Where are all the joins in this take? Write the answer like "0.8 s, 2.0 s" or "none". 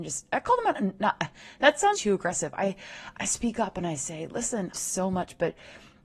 1.9 s, 3.1 s, 4.7 s

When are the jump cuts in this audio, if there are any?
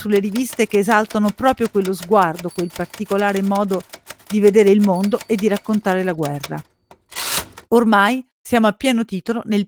7.7 s

